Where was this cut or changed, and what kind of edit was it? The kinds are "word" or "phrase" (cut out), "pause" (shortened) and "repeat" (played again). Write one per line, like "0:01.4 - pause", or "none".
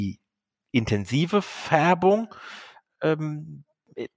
none